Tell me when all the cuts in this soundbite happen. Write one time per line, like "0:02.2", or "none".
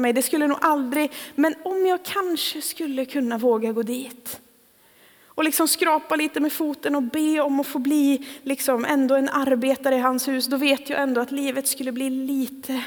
none